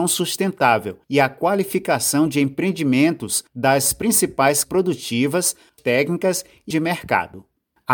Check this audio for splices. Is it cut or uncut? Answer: cut